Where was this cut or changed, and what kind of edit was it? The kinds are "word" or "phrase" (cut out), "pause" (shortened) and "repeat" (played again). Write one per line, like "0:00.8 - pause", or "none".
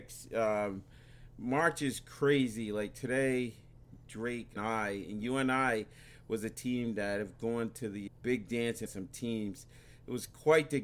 0:04.6 - phrase
0:08.1 - word
0:08.9 - word